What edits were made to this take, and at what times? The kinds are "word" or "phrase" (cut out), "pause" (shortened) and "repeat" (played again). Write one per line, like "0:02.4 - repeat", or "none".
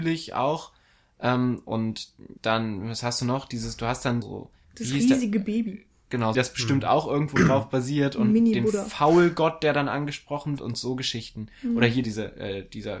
0:02.4 - pause
0:04.2 - word
0:04.6 - pause
0:06.3 - phrase
0:10.6 - phrase
0:12.0 - word